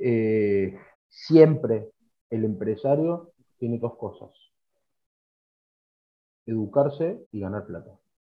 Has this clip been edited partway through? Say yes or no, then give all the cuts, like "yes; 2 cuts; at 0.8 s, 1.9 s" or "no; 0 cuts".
yes; 4 cuts; at 0.9 s, 3.5 s, 3.8 s, 7.2 s